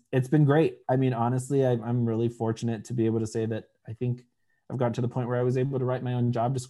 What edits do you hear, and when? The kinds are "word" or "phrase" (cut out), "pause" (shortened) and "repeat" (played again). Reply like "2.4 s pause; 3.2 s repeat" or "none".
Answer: none